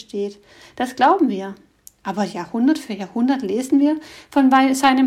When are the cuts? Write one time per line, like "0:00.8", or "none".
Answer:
none